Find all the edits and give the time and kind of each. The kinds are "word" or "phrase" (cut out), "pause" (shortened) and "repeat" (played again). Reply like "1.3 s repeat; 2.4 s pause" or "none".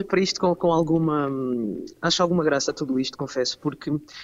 none

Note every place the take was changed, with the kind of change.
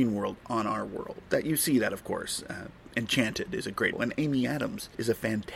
3.9 s word

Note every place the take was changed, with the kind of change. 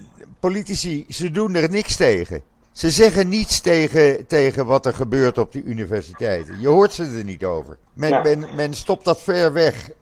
2.6 s pause; 7.9 s pause

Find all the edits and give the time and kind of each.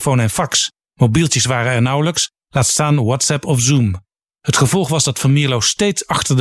none

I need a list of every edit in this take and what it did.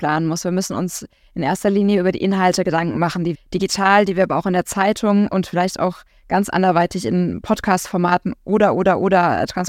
3.3 s word

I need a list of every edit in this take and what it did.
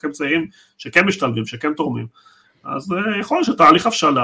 none

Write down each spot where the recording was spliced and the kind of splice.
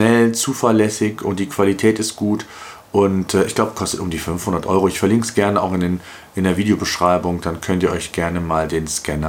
none

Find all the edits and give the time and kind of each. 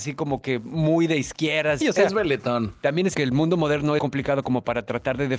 1.8 s phrase; 3.1 s word; 4.0 s phrase

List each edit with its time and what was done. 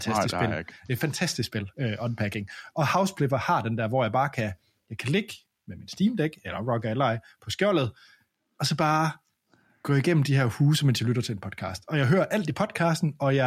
none

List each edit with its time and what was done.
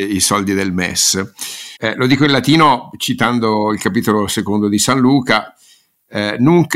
1.8 s pause

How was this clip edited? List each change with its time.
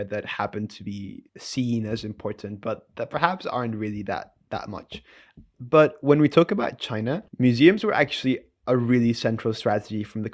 1.3 s pause; 7.3 s pause

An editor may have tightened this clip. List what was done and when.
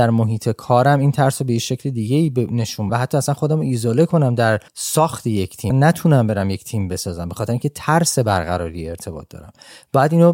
2.9 s word; 4.7 s pause; 5.7 s word

